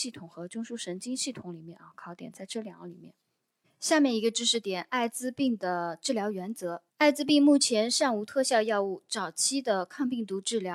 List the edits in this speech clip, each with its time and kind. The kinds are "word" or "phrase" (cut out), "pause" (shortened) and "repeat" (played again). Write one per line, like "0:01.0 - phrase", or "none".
0:03.6 - pause
0:06.9 - pause